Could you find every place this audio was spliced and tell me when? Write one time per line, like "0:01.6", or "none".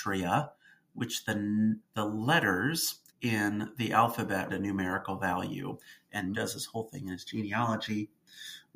0:01.8
0:03.1
0:04.5
0:06.3